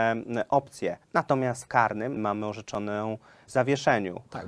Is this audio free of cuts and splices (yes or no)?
no